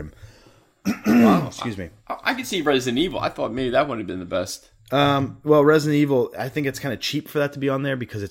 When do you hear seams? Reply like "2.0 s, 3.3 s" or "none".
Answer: none